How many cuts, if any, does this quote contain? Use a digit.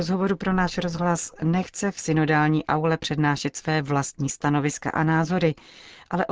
0